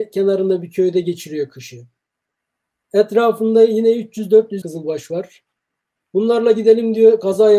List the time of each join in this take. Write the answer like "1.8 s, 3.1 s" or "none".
4.6 s